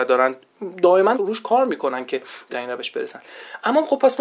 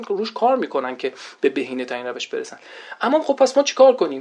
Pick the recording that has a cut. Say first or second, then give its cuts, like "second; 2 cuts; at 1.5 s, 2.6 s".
first; 2 cuts; at 1.1 s, 2.5 s